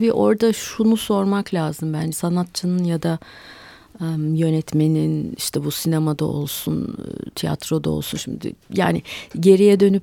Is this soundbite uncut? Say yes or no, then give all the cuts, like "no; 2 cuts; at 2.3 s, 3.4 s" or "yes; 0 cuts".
no; 1 cut; at 2.1 s